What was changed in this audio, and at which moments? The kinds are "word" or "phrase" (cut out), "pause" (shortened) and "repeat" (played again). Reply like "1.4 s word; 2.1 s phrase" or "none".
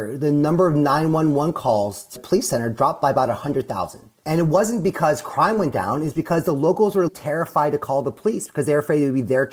2.1 s word; 7.1 s word